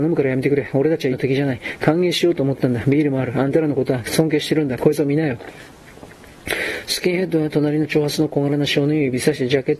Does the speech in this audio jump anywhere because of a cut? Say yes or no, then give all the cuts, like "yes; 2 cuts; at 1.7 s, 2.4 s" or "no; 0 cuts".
yes; 1 cut; at 1.1 s